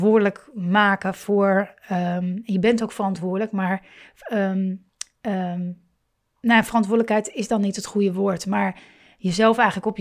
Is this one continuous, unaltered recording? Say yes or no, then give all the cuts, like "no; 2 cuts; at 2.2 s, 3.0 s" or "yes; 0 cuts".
yes; 0 cuts